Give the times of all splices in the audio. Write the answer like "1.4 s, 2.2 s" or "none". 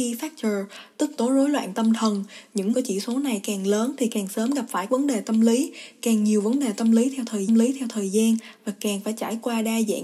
1.2 s, 2.7 s, 4.9 s, 7.5 s